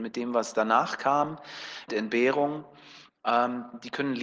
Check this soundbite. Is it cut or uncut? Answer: cut